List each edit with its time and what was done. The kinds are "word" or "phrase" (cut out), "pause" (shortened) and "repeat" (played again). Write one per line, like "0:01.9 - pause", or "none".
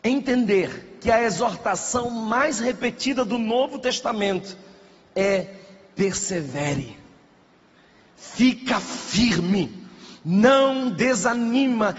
none